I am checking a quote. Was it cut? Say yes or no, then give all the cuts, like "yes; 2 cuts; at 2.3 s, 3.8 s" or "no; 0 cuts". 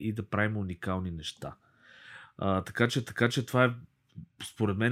yes; 1 cut; at 3.1 s